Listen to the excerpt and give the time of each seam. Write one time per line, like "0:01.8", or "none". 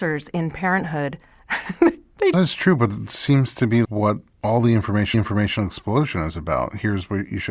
0:02.3
0:03.1
0:03.8
0:05.1